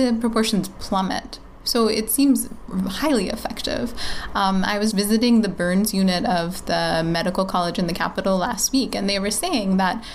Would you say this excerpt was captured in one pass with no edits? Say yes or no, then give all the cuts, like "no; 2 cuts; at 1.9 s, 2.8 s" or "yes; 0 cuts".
no; 1 cut; at 4.9 s